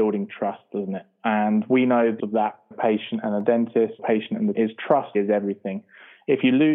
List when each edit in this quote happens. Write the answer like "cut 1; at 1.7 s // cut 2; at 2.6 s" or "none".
cut 1; at 2.2 s // cut 2; at 2.7 s // cut 3; at 4.0 s // cut 4; at 4.5 s // cut 5; at 5.1 s